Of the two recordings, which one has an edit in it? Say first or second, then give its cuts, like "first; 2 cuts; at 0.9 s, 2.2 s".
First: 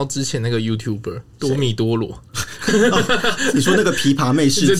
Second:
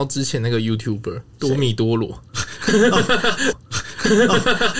second; 1 cut; at 3.5 s